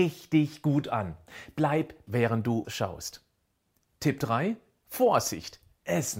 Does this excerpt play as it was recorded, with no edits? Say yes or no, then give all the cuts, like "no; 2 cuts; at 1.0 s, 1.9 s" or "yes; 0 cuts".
no; 2 cuts; at 2.1 s, 2.6 s